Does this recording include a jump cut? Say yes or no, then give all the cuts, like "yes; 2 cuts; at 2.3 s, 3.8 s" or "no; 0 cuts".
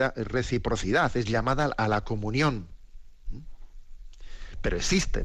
no; 0 cuts